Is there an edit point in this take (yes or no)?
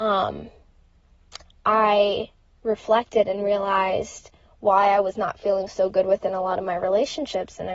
no